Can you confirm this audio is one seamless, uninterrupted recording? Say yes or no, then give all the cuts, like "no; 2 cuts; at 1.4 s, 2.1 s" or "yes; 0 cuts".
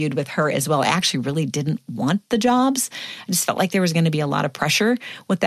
yes; 0 cuts